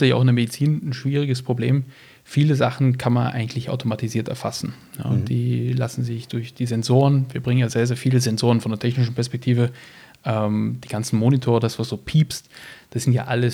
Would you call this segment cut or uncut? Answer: uncut